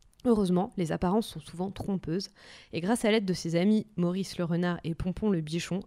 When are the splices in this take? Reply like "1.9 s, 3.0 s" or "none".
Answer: none